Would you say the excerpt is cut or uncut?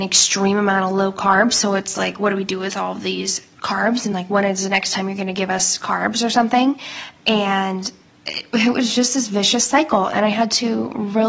uncut